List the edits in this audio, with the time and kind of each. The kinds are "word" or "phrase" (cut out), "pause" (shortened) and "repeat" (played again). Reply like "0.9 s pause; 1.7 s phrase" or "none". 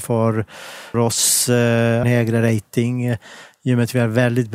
0.9 s word; 2.0 s phrase